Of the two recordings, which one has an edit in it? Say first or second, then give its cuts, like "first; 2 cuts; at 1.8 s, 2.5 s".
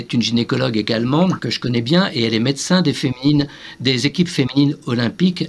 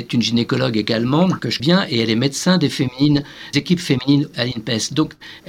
second; 3 cuts; at 1.6 s, 3.5 s, 4.3 s